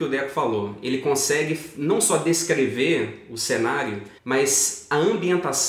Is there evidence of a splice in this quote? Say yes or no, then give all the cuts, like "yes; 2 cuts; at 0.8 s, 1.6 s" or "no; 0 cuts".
yes; 1 cut; at 4.2 s